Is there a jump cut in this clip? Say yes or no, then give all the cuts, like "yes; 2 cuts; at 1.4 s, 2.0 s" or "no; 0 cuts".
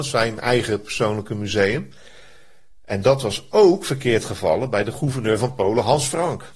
no; 0 cuts